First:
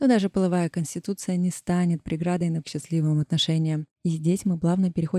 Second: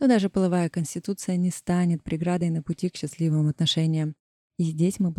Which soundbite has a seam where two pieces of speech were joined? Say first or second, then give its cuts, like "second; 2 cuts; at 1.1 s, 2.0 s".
first; 2 cuts; at 2.6 s, 3.9 s